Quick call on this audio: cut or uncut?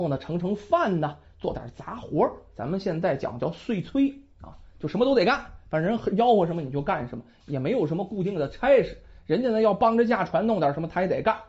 uncut